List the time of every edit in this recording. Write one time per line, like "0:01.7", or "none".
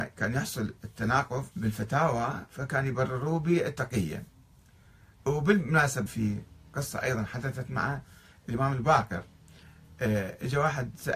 0:01.5
0:06.1